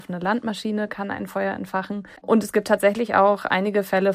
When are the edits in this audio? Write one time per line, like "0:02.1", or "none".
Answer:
0:02.2